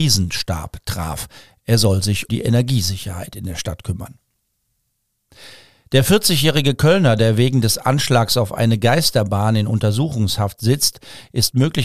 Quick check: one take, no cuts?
no; 1 cut; at 2.3 s

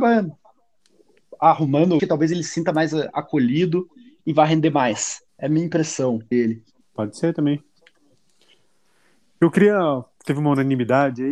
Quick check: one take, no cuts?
no; 4 cuts; at 2.0 s, 5.3 s, 6.3 s, 6.8 s

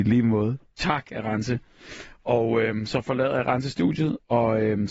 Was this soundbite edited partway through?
no; 0 cuts

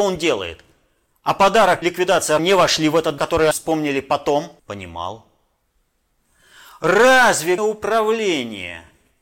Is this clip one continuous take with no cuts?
no; 6 cuts; at 1.8 s, 2.4 s, 3.2 s, 3.5 s, 4.6 s, 7.6 s

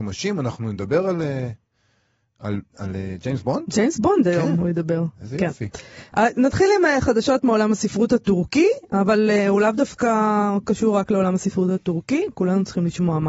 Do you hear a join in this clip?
no; 0 cuts

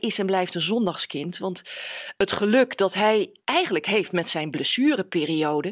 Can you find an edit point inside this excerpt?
yes; 1 cut; at 3.4 s

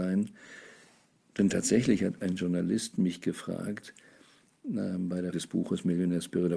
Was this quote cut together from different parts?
yes; 1 cut; at 5.3 s

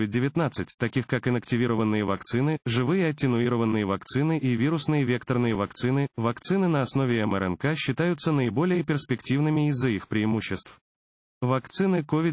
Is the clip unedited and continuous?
yes; 0 cuts

